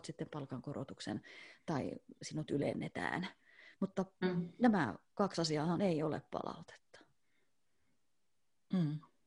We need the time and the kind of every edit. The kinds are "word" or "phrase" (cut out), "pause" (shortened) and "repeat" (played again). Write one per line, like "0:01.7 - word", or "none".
none